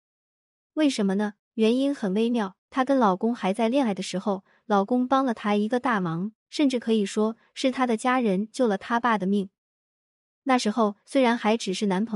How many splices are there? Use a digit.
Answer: 3